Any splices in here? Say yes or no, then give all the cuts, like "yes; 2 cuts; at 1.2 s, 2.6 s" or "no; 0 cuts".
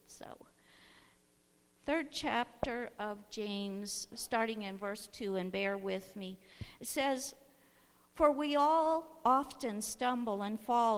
yes; 1 cut; at 4.1 s